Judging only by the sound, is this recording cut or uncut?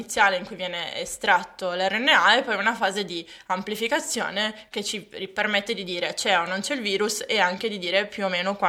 uncut